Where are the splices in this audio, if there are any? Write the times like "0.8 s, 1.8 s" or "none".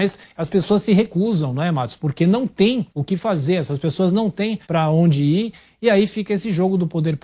2.9 s, 4.6 s